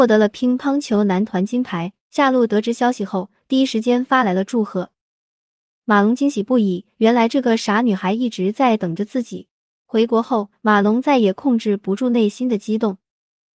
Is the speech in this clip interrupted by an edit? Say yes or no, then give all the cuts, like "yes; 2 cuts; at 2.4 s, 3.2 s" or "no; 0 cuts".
yes; 2 cuts; at 2.0 s, 9.6 s